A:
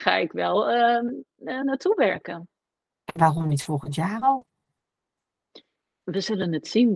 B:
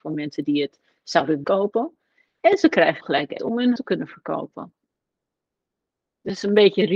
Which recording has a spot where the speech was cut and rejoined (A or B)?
B